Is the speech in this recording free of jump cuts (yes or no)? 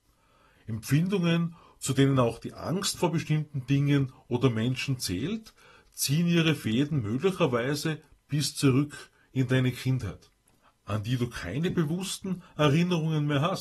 yes